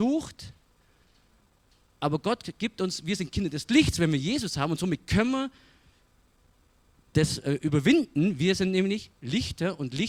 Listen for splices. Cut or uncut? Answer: uncut